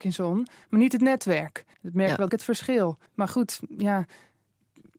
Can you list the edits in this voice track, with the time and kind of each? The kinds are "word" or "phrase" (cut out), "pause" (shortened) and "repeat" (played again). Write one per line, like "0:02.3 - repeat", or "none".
0:01.7 - pause
0:02.3 - word
0:03.1 - pause

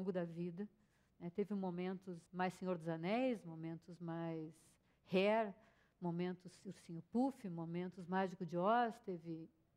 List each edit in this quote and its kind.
0:02.3 - pause

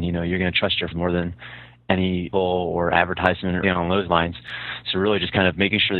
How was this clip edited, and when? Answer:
0:00.9 - word
0:02.3 - word
0:03.6 - word

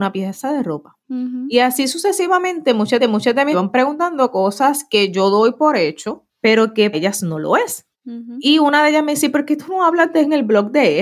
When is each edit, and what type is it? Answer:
0:01.0 - pause
0:03.0 - repeat
0:03.5 - phrase
0:06.3 - pause
0:06.9 - word
0:07.9 - pause

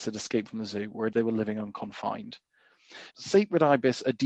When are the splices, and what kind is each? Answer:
0:01.1 - word
0:03.1 - word

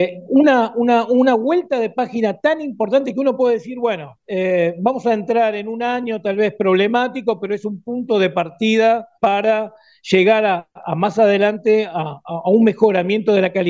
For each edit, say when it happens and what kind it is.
0:04.2 - pause
0:09.2 - pause

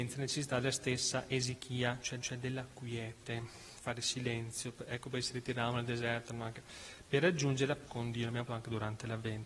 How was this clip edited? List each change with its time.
0:02.2 - repeat
0:07.9 - word
0:08.5 - word

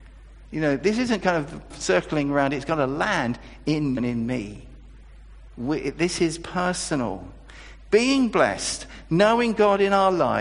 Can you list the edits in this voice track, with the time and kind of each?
0:01.2 - phrase
0:01.7 - phrase
0:04.0 - word

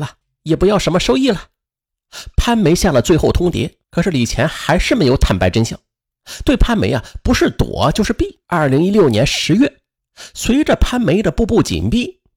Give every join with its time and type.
0:01.7 - pause
0:03.8 - pause
0:08.4 - pause
0:10.0 - pause

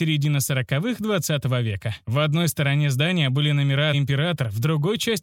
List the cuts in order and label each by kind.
0:03.9 - word

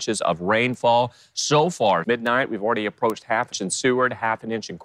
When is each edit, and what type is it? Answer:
0:02.0 - word
0:03.5 - word

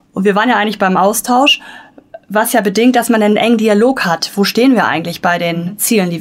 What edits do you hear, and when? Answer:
none

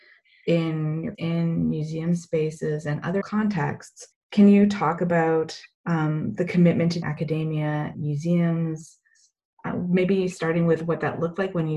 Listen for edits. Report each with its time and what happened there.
0:01.1 - word
0:03.2 - word
0:04.1 - pause
0:05.7 - pause
0:07.0 - phrase
0:07.9 - word

